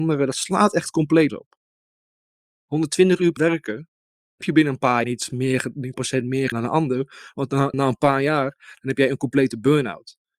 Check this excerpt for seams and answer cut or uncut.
cut